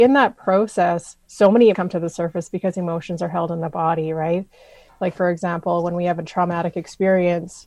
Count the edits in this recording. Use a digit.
3